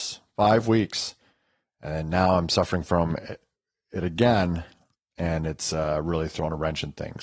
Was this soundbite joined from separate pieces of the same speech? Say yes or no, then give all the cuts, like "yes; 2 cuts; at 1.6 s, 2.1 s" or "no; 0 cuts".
no; 0 cuts